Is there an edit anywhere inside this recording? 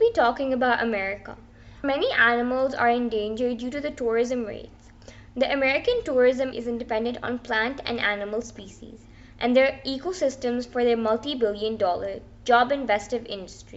yes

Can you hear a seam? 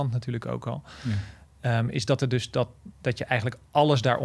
no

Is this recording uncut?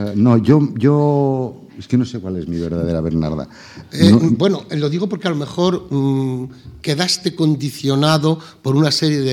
no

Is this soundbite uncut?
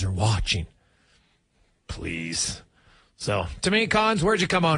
yes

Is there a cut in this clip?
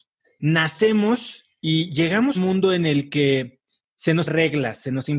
yes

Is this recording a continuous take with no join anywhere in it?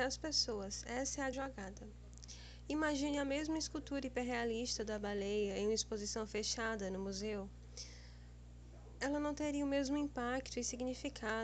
no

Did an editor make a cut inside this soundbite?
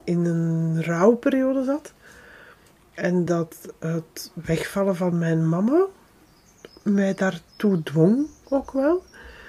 no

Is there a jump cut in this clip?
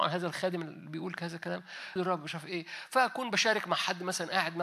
yes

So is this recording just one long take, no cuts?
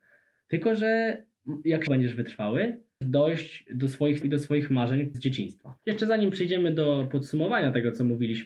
no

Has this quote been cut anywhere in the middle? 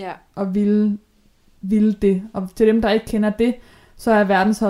no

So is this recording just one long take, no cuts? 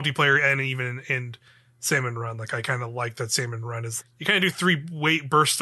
no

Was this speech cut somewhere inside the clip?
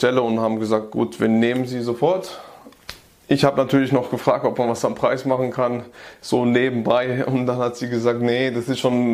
no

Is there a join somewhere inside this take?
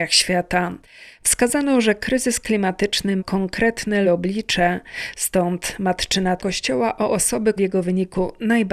yes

